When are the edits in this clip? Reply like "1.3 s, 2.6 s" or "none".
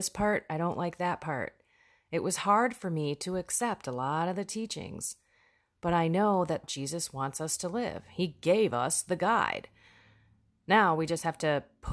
6.6 s